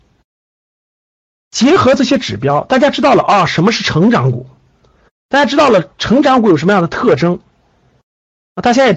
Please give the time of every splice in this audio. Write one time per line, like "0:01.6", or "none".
none